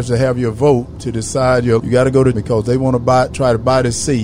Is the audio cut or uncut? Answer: cut